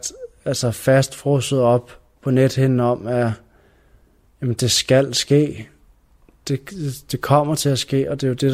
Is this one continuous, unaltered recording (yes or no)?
yes